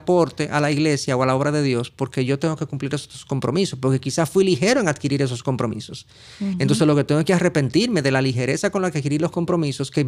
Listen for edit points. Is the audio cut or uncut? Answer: uncut